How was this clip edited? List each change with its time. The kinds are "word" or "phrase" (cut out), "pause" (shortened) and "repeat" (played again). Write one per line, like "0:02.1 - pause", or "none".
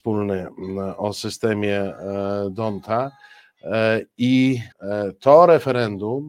0:04.7 - pause